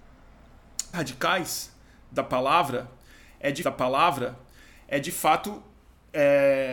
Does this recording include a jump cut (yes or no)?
yes